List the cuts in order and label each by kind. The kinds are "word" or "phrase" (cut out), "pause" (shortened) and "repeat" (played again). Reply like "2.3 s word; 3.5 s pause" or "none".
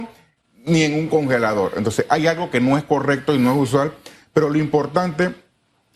none